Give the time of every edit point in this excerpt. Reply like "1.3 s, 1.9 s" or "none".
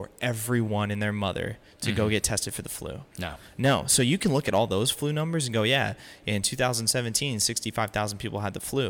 3.1 s